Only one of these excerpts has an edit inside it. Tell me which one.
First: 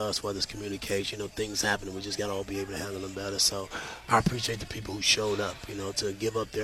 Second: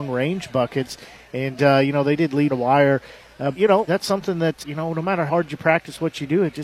second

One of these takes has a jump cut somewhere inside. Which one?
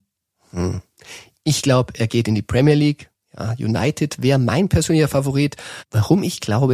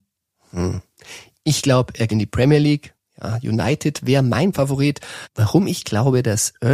second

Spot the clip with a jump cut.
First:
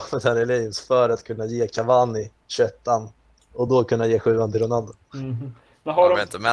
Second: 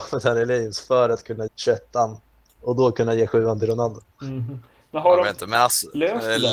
second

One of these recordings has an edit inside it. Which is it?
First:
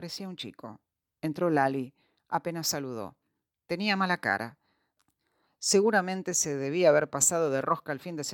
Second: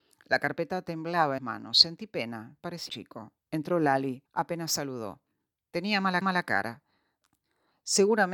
second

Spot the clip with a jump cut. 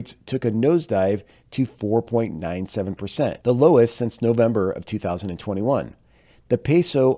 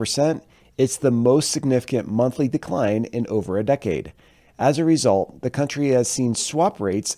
first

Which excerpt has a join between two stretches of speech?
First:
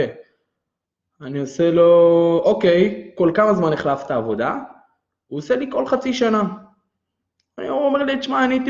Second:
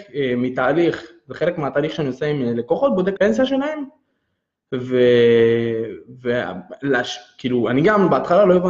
second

